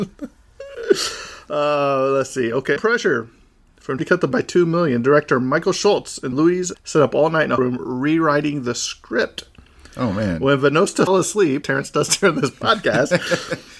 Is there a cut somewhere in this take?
yes; 8 cuts; at 2.8 s, 4.0 s, 4.3 s, 6.3 s, 6.7 s, 7.6 s, 11.1 s, 11.6 s

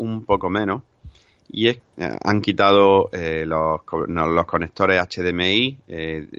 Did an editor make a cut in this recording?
yes; 1 cut; at 1.8 s

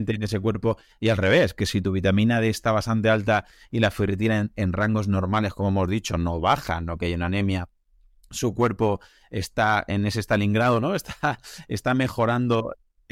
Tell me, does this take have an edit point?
no; 0 cuts

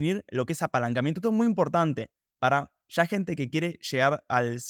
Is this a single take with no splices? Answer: yes; 0 cuts

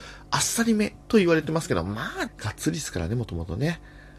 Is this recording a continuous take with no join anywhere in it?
no; 2 cuts; at 1.0 s, 2.3 s

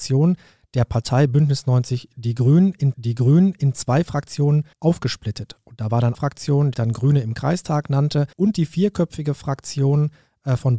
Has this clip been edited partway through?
yes; 5 cuts; at 2.9 s, 4.7 s, 6.1 s, 6.7 s, 8.3 s

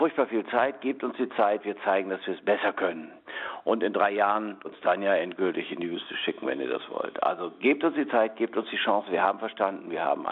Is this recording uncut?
no; 1 cut; at 4.6 s

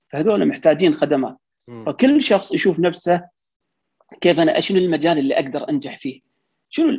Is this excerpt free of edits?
yes; 0 cuts

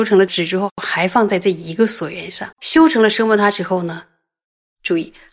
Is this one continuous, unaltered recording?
no; 1 cut; at 2.5 s

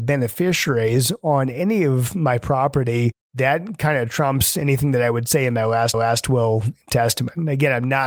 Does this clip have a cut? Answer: yes; 1 cut; at 5.9 s

